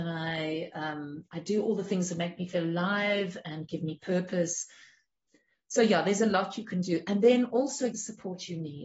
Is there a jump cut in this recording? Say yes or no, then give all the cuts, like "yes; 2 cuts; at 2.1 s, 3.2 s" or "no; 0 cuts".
yes; 1 cut; at 7.9 s